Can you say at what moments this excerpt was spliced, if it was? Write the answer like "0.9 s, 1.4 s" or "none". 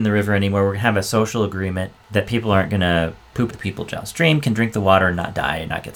3.5 s